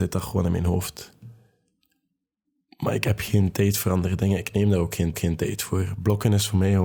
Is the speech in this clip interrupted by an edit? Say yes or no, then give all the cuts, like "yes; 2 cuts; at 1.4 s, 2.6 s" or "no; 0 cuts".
yes; 1 cut; at 5.1 s